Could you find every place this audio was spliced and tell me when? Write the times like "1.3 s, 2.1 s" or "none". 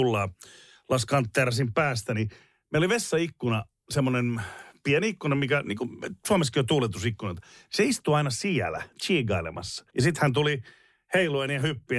9.9 s